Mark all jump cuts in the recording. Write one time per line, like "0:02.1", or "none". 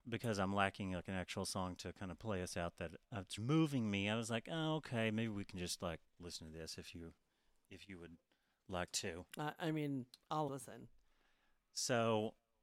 0:03.4
0:06.1
0:09.3
0:10.5